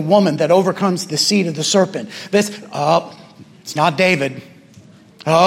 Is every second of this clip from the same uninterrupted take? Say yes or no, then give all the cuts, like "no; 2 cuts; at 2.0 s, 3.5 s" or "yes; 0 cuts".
yes; 0 cuts